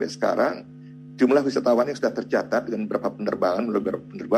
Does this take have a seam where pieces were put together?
no; 0 cuts

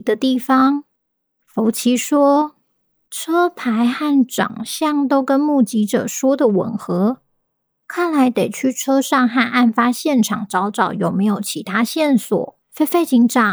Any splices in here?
yes; 2 cuts; at 2.6 s, 12.6 s

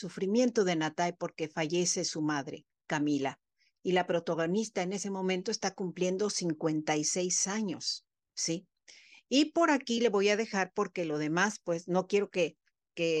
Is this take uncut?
yes; 0 cuts

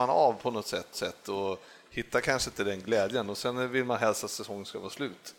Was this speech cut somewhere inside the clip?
yes; 1 cut; at 0.9 s

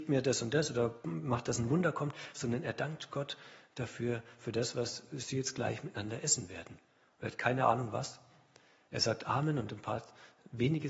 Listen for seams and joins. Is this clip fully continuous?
yes; 0 cuts

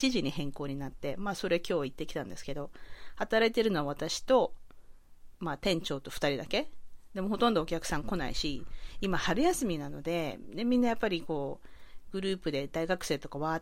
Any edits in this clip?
no; 0 cuts

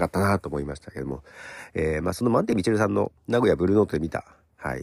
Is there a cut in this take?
yes; 1 cut; at 3.2 s

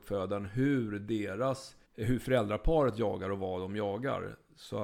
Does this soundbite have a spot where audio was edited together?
yes; 1 cut; at 1.8 s

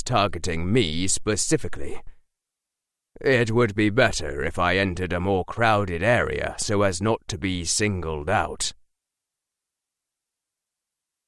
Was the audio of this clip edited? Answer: no; 0 cuts

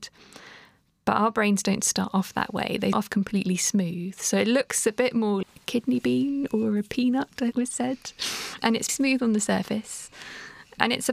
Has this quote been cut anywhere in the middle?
yes; 4 cuts; at 2.9 s, 5.4 s, 7.5 s, 8.9 s

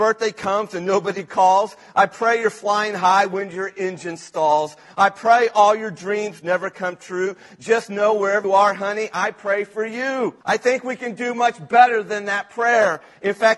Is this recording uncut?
no; 2 cuts; at 8.4 s, 10.4 s

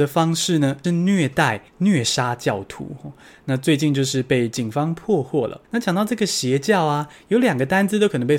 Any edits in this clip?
yes; 2 cuts; at 1.7 s, 5.6 s

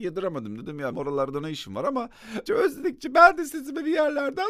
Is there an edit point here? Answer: yes; 2 cuts; at 0.9 s, 2.5 s

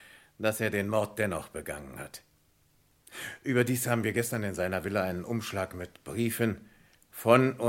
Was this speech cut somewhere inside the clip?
no; 0 cuts

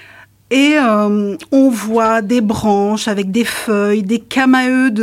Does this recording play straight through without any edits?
yes; 0 cuts

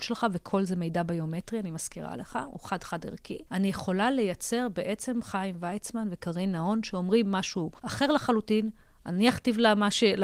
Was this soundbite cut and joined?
yes; 2 cuts; at 3.5 s, 7.8 s

